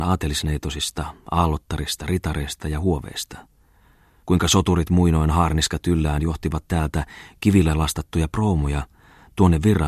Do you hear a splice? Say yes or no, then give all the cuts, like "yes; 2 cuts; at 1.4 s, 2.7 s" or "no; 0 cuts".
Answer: no; 0 cuts